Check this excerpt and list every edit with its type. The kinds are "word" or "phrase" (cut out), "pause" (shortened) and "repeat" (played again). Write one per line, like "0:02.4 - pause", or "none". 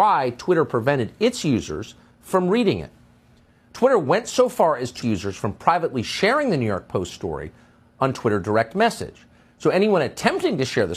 0:05.0 - phrase